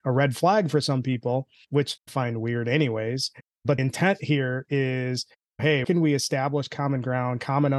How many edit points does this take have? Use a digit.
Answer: 3